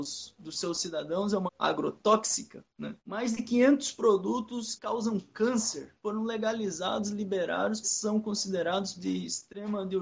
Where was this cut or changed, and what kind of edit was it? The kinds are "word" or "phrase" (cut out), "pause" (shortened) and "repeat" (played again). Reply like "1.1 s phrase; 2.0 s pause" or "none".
1.5 s word; 3.0 s pause; 4.8 s word; 6.0 s pause; 7.8 s word; 8.9 s word